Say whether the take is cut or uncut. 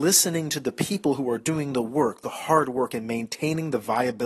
uncut